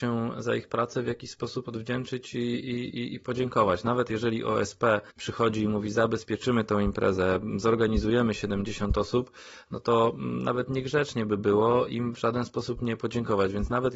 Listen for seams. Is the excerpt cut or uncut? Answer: cut